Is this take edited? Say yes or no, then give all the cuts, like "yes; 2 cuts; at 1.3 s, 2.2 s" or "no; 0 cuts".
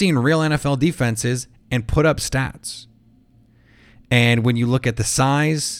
no; 0 cuts